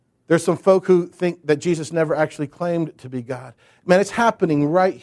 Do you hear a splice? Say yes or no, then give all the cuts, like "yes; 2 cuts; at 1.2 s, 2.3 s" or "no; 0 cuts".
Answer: no; 0 cuts